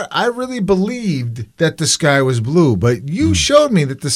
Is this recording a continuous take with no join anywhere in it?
no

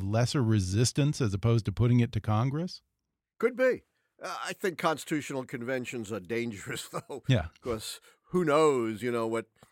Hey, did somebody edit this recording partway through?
no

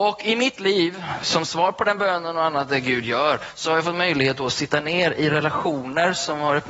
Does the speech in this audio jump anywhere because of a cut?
no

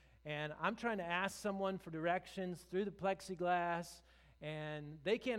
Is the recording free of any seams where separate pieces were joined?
yes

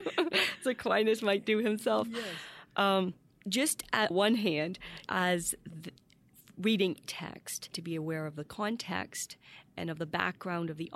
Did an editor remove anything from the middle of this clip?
yes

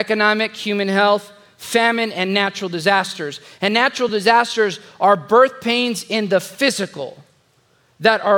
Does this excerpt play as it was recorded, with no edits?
yes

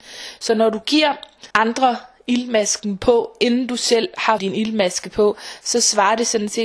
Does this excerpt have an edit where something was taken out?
yes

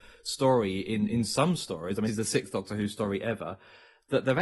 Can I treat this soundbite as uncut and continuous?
no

